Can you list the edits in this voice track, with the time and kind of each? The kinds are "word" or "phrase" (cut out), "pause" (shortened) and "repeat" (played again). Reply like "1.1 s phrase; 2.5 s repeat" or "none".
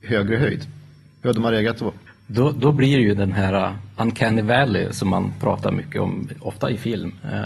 2.1 s pause